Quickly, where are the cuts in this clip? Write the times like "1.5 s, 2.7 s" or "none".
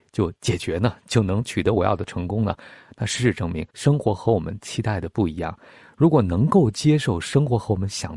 3.7 s